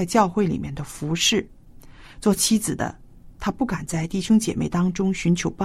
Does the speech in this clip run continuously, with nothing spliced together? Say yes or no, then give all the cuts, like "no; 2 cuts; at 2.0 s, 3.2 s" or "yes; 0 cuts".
yes; 0 cuts